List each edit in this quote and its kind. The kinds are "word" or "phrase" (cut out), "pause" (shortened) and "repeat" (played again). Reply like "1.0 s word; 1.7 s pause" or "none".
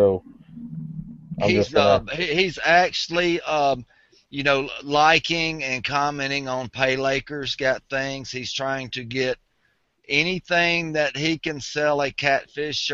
none